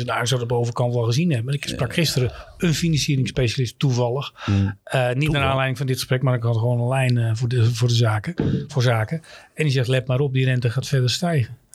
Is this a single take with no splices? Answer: yes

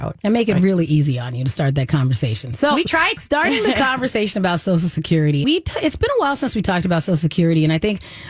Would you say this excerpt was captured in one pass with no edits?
no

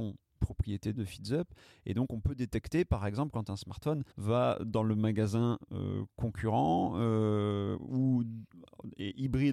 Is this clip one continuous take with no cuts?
no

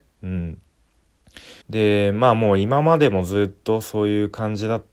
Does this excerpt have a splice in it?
yes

